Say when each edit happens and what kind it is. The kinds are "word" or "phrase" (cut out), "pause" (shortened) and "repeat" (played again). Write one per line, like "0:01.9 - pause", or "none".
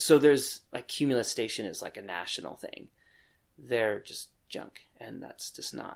none